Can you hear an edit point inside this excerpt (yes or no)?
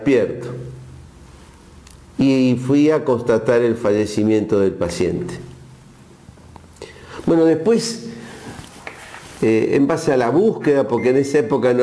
no